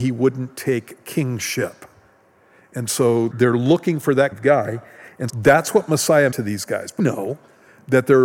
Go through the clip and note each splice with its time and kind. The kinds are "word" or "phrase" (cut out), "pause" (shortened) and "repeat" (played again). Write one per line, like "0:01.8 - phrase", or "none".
0:03.3 - word
0:04.3 - word
0:05.3 - word
0:06.3 - word
0:07.0 - word

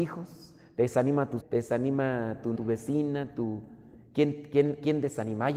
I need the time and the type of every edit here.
0:01.4 - word
0:02.6 - word

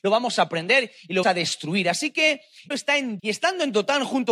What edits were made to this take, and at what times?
0:01.2 - word
0:02.7 - word
0:03.2 - word

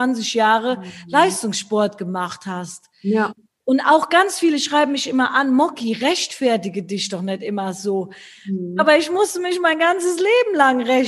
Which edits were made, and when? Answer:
none

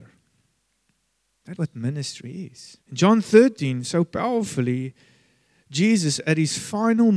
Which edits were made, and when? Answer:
0:01.6 - word
0:02.8 - pause

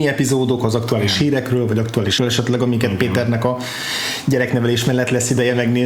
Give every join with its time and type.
0:02.2 - word

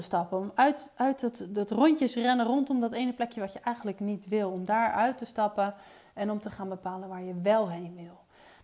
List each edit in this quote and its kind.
none

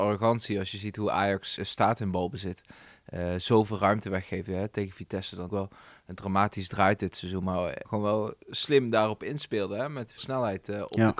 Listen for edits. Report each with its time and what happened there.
0:01.6 - word
0:05.5 - word
0:07.8 - word
0:10.2 - word

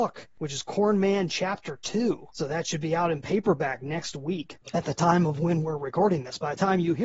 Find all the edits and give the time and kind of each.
0:02.3 - pause

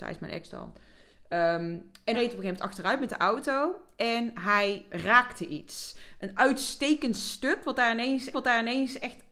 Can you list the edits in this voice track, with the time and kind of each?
0:02.1 - phrase
0:04.9 - word
0:08.3 - repeat

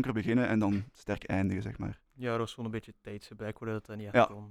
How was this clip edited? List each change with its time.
0:02.1 - pause

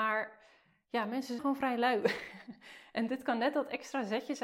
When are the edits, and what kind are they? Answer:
0:01.4 - word

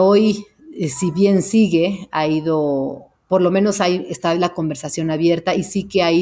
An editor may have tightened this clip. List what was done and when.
none

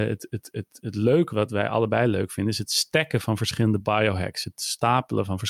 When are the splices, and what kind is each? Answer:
0:01.3 - word

